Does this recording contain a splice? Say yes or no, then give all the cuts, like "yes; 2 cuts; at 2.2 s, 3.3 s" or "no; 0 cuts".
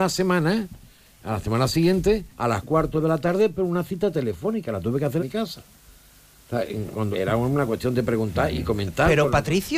yes; 4 cuts; at 2.3 s, 2.6 s, 5.2 s, 7.1 s